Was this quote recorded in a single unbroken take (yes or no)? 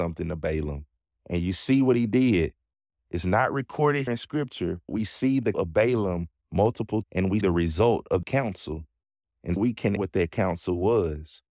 no